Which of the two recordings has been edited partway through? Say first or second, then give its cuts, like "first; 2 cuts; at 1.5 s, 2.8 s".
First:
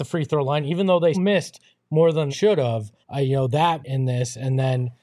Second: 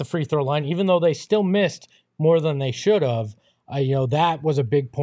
first; 4 cuts; at 1.1 s, 2.3 s, 3.0 s, 3.8 s